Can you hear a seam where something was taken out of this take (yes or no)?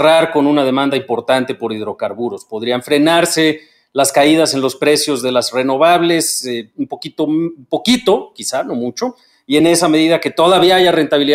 no